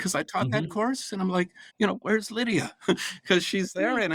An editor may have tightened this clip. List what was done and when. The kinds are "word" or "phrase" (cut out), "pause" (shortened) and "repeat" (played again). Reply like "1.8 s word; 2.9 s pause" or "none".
1.7 s pause